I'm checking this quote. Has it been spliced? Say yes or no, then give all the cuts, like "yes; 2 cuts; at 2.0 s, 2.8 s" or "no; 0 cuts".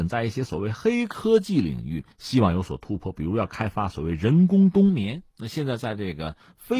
yes; 2 cuts; at 2.1 s, 5.3 s